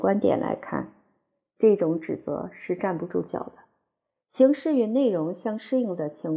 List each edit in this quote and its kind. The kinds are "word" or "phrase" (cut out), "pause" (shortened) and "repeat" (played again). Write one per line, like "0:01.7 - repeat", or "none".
none